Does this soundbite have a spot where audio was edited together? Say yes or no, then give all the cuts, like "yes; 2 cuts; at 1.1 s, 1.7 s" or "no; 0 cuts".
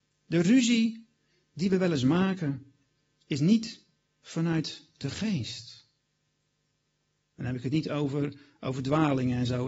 no; 0 cuts